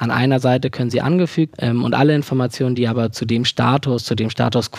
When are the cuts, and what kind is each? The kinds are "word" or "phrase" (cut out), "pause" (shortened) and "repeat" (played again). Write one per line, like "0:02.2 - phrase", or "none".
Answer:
0:01.5 - word